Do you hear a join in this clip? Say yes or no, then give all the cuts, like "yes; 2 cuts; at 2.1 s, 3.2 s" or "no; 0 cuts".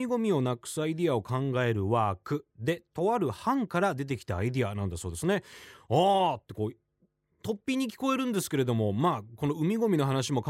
no; 0 cuts